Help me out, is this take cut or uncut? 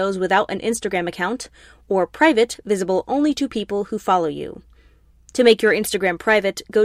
uncut